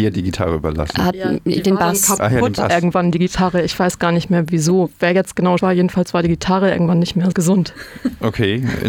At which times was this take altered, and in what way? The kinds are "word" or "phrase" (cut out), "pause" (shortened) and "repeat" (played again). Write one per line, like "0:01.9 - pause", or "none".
0:05.6 - word
0:07.3 - word